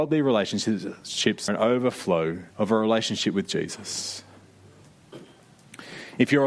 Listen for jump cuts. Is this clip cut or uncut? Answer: cut